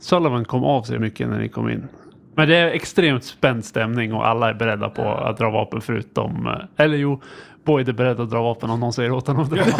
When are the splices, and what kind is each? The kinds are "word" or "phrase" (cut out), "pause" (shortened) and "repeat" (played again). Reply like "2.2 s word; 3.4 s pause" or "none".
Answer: 1.0 s word

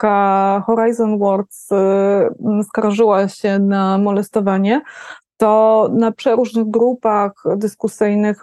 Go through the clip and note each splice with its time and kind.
none

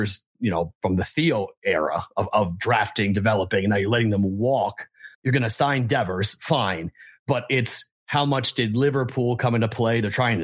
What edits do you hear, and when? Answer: 5.1 s pause

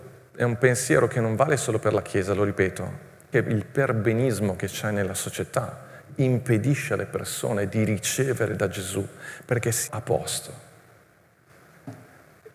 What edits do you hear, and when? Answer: 3.3 s word; 9.9 s word

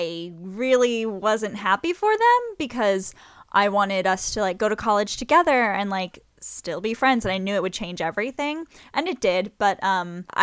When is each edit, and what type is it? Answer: none

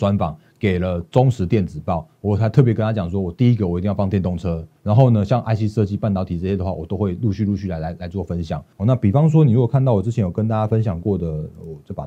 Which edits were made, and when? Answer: 4.8 s pause; 8.7 s pause

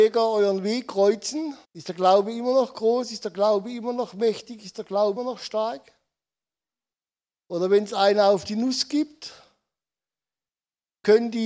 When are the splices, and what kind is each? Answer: 1.6 s pause; 5.2 s word; 7.1 s pause

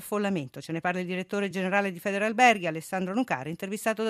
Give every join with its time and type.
none

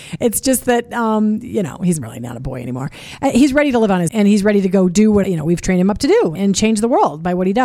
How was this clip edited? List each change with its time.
4.1 s word; 5.2 s word; 6.4 s word

